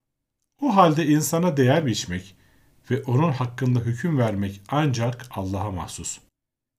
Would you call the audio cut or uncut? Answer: uncut